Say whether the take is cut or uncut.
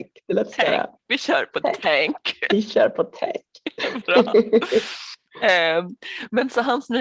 uncut